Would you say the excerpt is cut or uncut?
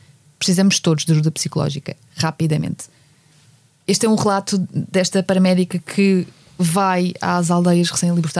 cut